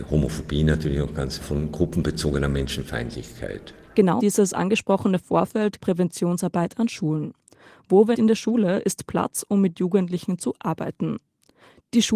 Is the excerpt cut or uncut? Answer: cut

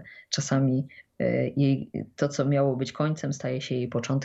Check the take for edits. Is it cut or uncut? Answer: uncut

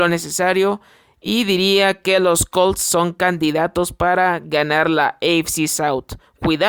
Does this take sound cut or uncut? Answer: uncut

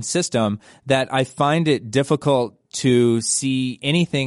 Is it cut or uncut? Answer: uncut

